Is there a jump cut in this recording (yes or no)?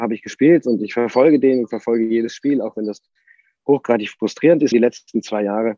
yes